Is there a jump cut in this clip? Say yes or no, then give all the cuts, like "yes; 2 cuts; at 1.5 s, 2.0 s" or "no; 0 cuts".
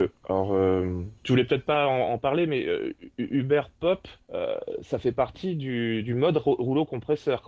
yes; 2 cuts; at 1.2 s, 4.2 s